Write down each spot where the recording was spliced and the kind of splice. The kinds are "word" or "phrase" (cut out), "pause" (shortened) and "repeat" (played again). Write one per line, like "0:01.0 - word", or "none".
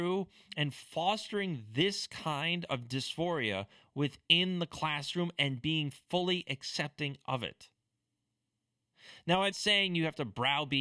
0:09.5 - word